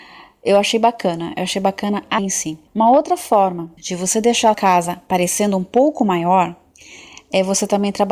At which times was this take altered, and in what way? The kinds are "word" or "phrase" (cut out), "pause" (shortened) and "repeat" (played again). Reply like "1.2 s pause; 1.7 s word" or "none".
2.2 s word; 2.7 s pause; 3.8 s pause; 4.5 s word